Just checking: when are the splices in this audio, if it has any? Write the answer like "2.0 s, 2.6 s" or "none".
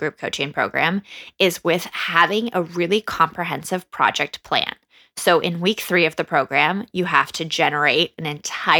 none